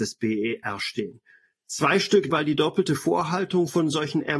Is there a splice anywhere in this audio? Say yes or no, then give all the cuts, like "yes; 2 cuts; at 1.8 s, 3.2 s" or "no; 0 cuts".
yes; 1 cut; at 2.3 s